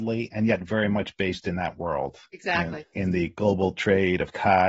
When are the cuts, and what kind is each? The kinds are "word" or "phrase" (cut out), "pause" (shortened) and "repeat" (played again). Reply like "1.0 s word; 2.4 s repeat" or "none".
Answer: none